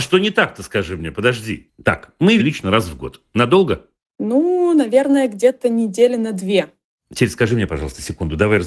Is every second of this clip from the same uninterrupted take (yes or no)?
no